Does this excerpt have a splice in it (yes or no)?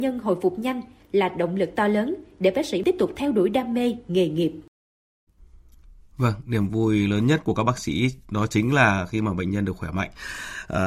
no